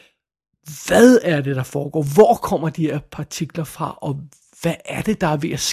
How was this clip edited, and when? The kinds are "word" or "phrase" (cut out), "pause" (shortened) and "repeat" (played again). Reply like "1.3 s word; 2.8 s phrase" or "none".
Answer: none